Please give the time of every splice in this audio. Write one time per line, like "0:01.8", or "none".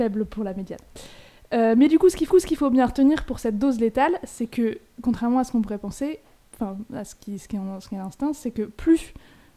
0:02.3